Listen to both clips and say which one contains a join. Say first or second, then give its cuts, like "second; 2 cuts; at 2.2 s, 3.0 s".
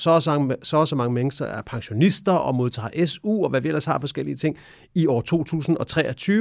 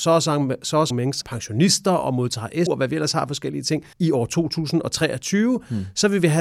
second; 4 cuts; at 0.9 s, 1.2 s, 2.7 s, 3.9 s